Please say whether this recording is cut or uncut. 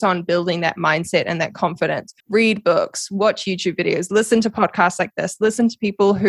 cut